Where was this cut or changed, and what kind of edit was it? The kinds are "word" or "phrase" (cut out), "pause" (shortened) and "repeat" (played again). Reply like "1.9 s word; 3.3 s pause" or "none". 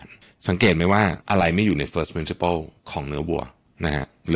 1.2 s pause; 2.8 s pause